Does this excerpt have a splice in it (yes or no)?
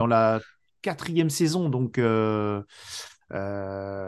no